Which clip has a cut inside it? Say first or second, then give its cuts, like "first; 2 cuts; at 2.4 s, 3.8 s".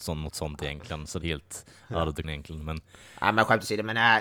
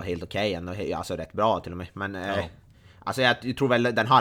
first; 2 cuts; at 1.2 s, 2.2 s